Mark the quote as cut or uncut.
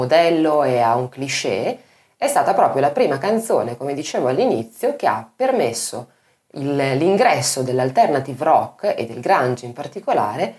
uncut